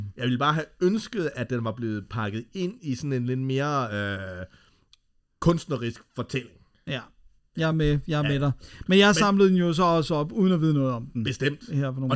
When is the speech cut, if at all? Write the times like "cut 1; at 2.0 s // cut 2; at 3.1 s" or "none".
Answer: none